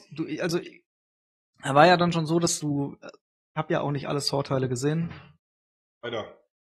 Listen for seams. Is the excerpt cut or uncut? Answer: uncut